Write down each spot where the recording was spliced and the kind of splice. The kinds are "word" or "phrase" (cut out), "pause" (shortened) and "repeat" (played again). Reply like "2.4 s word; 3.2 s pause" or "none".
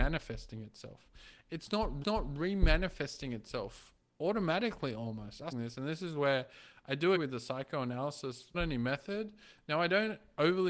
2.0 s repeat; 5.5 s phrase; 7.2 s word; 8.5 s word